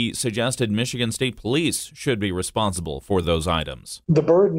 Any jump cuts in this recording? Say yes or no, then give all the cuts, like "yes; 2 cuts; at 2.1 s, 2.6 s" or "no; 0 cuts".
no; 0 cuts